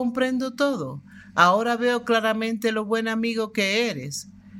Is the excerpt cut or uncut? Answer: uncut